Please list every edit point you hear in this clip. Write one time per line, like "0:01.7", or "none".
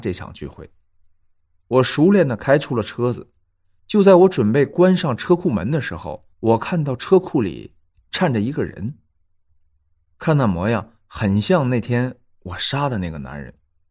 0:06.3